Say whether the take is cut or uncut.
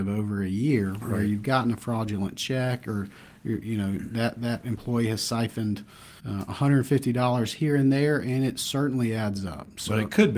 cut